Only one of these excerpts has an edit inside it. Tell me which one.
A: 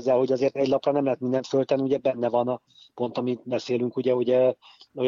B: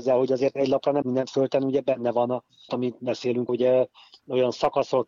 B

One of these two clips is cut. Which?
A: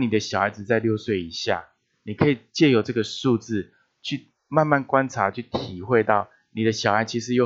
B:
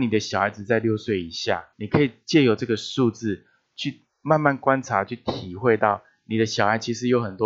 B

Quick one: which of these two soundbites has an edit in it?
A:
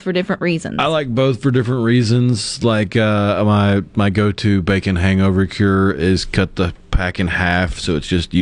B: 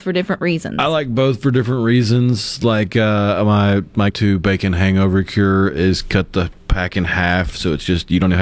B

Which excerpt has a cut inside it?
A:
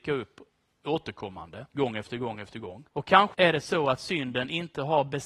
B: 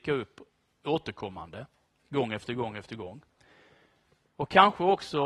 A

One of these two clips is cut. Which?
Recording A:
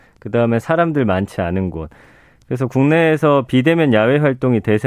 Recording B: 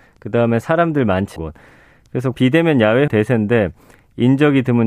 B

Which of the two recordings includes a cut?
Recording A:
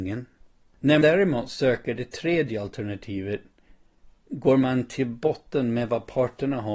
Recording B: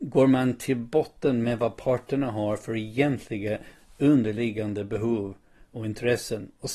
A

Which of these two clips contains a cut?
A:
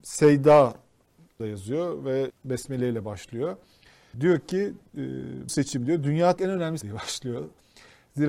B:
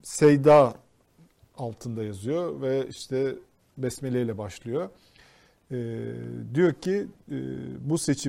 A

